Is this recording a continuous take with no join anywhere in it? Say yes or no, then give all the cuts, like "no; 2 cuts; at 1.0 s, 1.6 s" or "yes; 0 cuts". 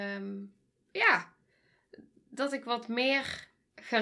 yes; 0 cuts